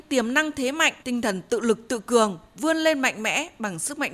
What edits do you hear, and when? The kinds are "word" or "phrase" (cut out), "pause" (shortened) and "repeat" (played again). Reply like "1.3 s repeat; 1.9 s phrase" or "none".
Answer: 1.0 s pause